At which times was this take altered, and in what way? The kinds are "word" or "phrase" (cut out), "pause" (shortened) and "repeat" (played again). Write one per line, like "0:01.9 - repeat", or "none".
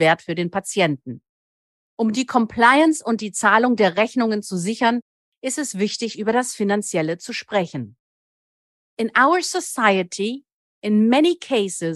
none